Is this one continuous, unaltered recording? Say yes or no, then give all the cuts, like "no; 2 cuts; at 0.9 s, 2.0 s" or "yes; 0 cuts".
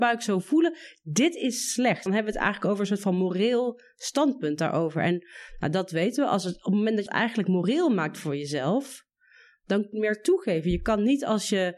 no; 3 cuts; at 2.1 s, 7.1 s, 9.9 s